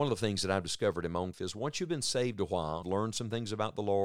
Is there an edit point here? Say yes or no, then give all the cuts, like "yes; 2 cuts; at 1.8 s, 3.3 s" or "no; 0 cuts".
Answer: yes; 2 cuts; at 1.3 s, 2.8 s